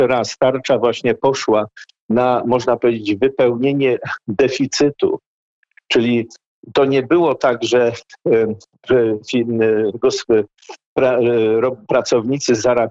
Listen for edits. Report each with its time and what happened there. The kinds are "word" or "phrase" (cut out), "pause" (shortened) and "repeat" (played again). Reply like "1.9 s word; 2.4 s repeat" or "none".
none